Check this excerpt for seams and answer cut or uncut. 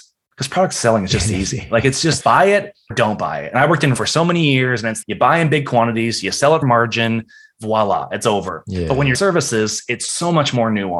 cut